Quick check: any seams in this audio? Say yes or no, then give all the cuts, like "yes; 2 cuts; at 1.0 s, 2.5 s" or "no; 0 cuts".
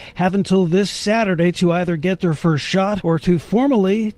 no; 0 cuts